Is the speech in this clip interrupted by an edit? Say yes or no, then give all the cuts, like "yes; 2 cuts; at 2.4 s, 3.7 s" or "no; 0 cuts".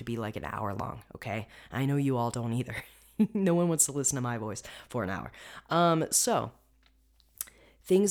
no; 0 cuts